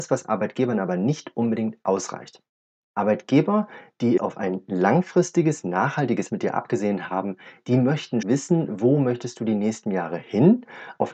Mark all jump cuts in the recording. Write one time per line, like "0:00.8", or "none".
0:04.2
0:06.3
0:08.2